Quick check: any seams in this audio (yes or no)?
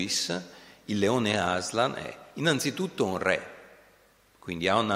no